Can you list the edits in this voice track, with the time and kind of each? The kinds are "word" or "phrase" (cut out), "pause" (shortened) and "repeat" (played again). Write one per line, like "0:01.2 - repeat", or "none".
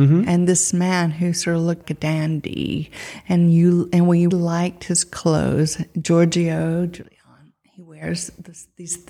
0:01.8 - word
0:04.3 - word